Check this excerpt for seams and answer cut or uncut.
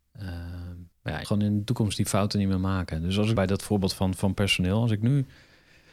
cut